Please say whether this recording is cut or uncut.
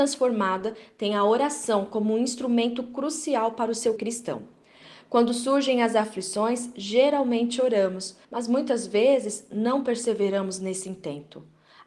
cut